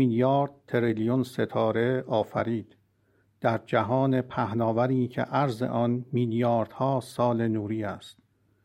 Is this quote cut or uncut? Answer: uncut